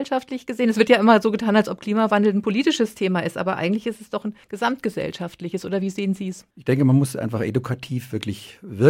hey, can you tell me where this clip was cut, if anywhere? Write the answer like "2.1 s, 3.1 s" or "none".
4.4 s, 6.5 s